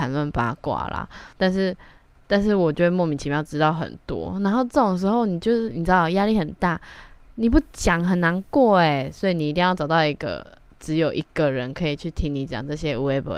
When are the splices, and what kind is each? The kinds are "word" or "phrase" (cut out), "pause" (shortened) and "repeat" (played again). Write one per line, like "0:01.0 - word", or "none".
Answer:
0:01.3 - pause

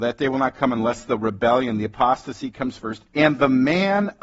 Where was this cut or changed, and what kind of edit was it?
0:03.1 - pause

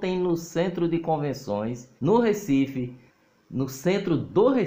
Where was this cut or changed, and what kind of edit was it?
0:02.0 - pause
0:03.1 - pause

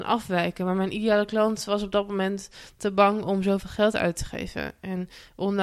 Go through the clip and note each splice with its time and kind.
none

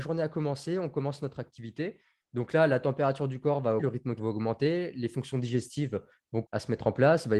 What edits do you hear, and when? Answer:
0:03.8 - word
0:04.2 - word
0:06.4 - word

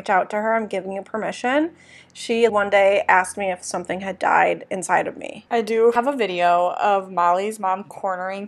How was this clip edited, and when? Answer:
0:02.5 - word

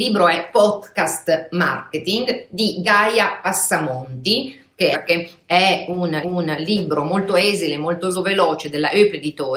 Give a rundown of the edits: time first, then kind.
0:04.9 - phrase
0:06.2 - repeat
0:08.1 - phrase

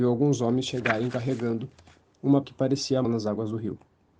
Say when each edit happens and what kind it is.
0:02.4 - word
0:03.0 - phrase

